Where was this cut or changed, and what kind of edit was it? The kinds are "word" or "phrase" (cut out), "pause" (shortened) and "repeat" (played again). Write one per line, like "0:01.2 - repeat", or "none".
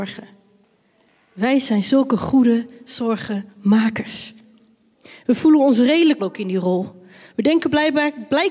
0:06.2 - word